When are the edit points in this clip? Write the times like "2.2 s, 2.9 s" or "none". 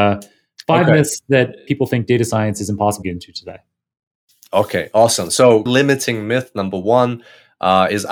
1.7 s, 3.0 s, 5.7 s